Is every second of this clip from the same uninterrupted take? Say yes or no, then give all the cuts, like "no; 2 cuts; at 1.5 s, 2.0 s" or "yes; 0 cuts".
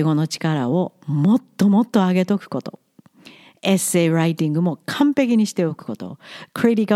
yes; 0 cuts